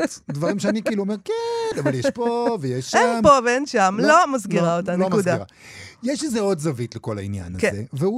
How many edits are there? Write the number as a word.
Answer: zero